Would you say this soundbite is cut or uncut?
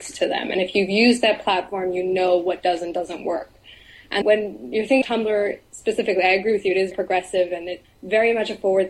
cut